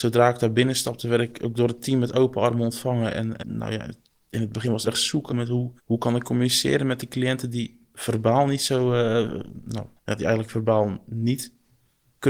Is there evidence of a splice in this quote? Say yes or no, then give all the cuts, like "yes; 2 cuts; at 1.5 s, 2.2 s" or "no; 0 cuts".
yes; 6 cuts; at 3.4 s, 4.1 s, 4.9 s, 5.3 s, 5.8 s, 10.0 s